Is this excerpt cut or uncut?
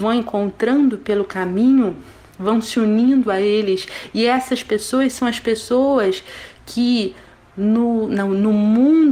uncut